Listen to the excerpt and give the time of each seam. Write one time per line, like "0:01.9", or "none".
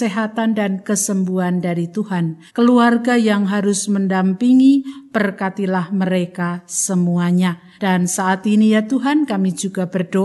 0:02.5
0:07.8